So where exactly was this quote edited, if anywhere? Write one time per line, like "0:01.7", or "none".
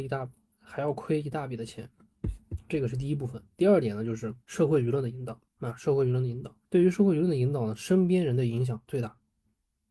0:04.4
0:05.5
0:06.6